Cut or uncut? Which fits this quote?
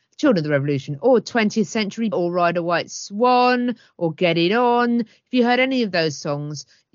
cut